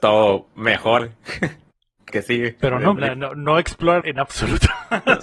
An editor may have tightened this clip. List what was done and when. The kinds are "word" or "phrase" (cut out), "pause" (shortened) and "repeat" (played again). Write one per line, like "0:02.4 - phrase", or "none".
0:01.0 - word
0:02.1 - word
0:03.0 - word
0:04.0 - word